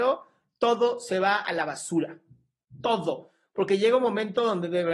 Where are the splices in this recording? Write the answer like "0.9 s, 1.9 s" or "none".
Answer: none

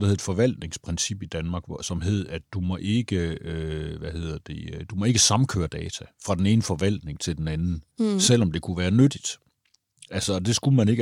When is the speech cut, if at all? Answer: none

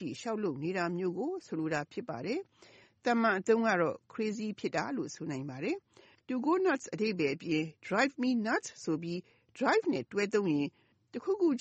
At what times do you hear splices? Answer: none

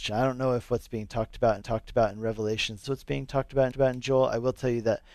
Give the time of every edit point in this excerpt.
1.6 s, 2.8 s, 3.7 s

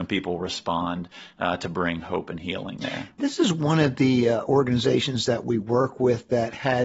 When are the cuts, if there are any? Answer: none

